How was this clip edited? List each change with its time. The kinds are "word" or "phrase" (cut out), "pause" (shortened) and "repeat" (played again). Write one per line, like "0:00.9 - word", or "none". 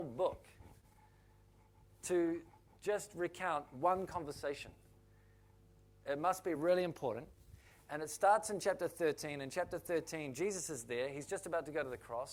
none

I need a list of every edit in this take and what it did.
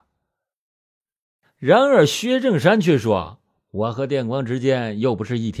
none

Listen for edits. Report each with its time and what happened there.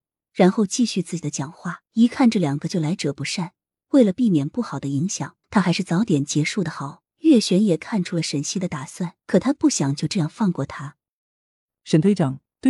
0:01.9 - pause
0:05.4 - pause
0:07.1 - pause
0:09.2 - pause

